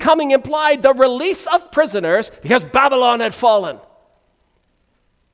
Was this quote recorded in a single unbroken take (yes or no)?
yes